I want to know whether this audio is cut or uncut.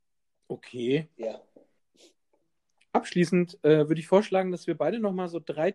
uncut